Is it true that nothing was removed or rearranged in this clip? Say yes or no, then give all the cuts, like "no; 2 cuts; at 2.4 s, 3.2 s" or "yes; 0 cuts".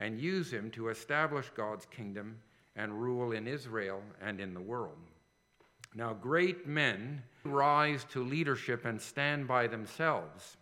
no; 1 cut; at 7.5 s